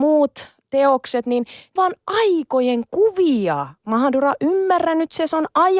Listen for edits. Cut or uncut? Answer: cut